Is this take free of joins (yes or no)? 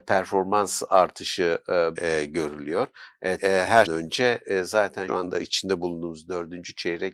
no